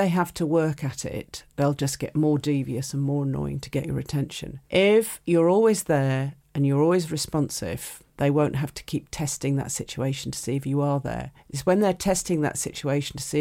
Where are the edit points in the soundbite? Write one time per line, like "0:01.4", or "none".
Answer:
0:04.6
0:08.1
0:11.4